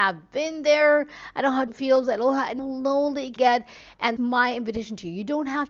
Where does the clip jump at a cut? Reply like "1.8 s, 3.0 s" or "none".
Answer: 1.7 s, 2.6 s, 3.4 s, 4.2 s